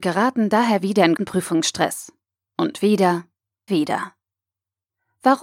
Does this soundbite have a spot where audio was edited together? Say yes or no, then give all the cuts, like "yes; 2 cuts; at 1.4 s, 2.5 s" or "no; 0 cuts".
yes; 2 cuts; at 1.2 s, 3.7 s